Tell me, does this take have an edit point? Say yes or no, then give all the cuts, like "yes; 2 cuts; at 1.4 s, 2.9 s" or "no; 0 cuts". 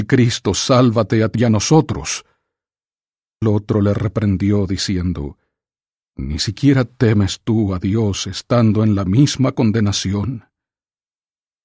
yes; 2 cuts; at 1.3 s, 3.4 s